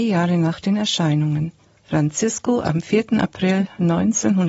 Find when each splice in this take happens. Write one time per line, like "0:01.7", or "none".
0:01.7